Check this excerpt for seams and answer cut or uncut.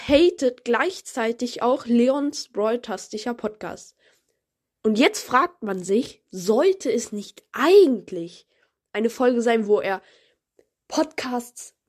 uncut